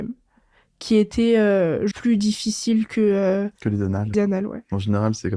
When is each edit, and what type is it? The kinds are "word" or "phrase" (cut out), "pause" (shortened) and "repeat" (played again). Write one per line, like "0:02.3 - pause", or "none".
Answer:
0:01.9 - word
0:03.6 - pause
0:04.1 - word

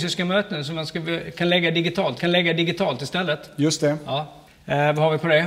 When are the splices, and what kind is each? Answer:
0:02.2 - repeat
0:04.5 - pause

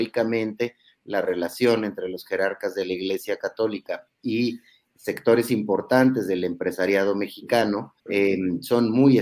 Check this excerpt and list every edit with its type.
0:08.0 - pause

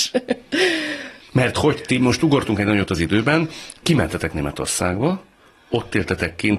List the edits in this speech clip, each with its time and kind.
0:03.8 - word

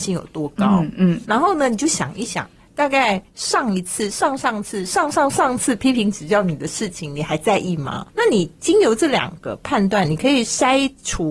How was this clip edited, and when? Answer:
0:08.1 - pause

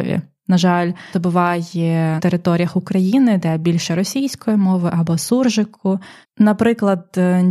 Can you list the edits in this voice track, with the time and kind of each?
0:01.1 - phrase
0:02.2 - phrase
0:06.2 - pause

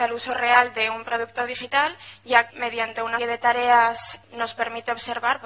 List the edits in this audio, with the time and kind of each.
0:02.5 - word
0:03.2 - word
0:04.2 - word

